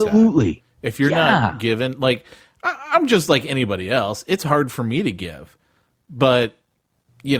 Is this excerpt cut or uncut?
uncut